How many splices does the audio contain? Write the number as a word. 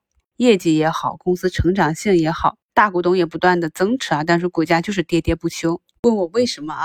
one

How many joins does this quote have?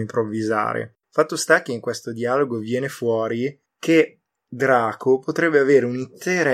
two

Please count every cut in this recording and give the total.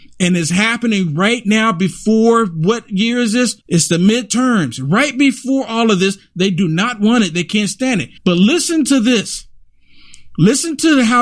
two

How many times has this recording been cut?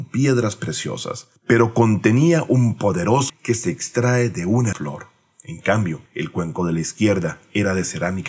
four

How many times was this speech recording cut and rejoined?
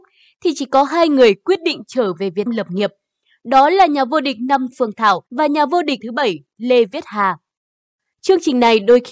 four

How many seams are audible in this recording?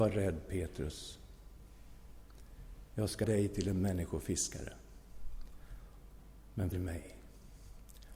two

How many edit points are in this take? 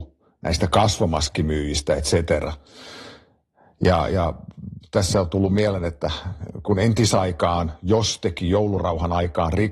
zero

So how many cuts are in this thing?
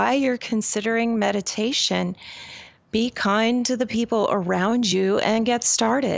zero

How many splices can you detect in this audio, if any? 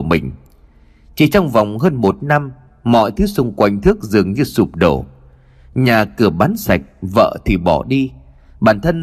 zero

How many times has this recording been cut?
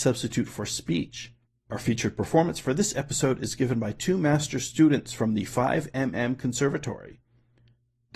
one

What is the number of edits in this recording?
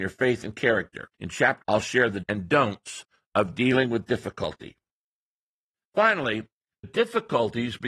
four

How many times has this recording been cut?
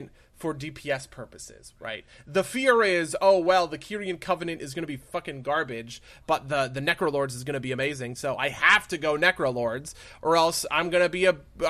zero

